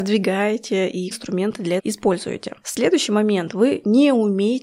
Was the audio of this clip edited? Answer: yes; 2 cuts; at 1.1 s, 1.8 s

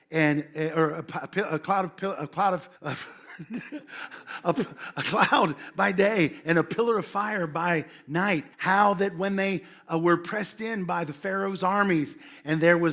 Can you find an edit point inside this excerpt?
yes; 2 cuts; at 2.8 s, 8.5 s

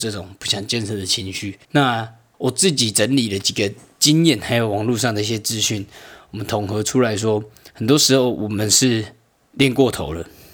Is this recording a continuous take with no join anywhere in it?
no; 1 cut; at 1.6 s

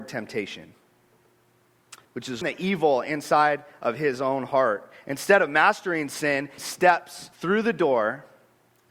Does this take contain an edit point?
yes; 4 cuts; at 2.0 s, 2.4 s, 6.6 s, 7.3 s

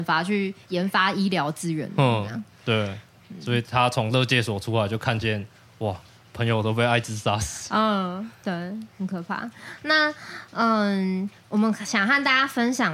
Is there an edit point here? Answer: no; 0 cuts

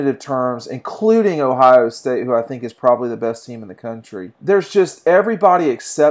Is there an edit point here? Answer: yes; 1 cut; at 4.3 s

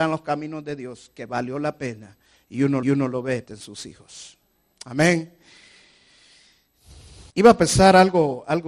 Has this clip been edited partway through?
yes; 3 cuts; at 2.8 s, 3.5 s, 7.3 s

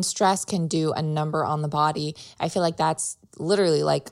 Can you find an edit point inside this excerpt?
no; 0 cuts

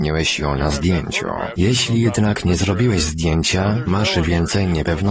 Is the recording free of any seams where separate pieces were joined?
yes; 0 cuts

